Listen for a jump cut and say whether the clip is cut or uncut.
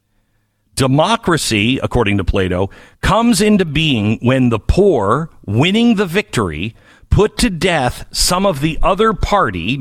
uncut